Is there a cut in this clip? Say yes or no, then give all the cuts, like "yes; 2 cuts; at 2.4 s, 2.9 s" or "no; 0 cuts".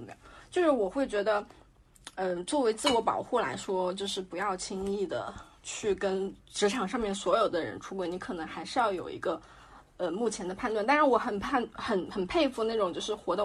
no; 0 cuts